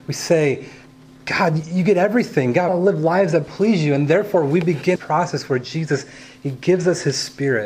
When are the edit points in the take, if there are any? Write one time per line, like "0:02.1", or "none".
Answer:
0:02.7
0:05.0